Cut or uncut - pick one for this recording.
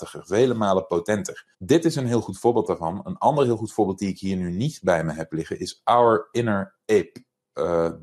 cut